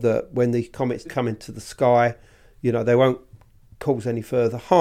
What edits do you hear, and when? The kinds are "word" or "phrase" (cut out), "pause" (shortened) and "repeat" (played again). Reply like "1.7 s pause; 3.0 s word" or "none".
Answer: 1.1 s word